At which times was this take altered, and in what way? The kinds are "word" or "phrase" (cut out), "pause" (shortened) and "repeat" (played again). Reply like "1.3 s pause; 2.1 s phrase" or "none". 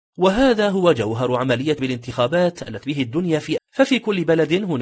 1.8 s word; 2.8 s word; 3.6 s word